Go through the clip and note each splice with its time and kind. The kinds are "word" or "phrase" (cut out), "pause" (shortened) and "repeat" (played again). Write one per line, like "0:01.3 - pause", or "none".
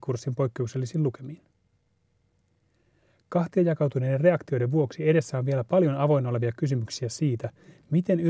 none